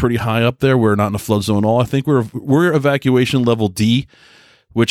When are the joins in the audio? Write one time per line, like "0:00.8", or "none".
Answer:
none